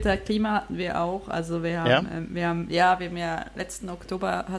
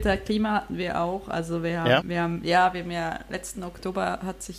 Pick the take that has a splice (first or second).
second